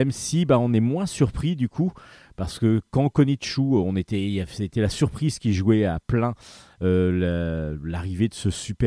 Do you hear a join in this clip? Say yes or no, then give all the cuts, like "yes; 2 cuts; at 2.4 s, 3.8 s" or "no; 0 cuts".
yes; 1 cut; at 3.4 s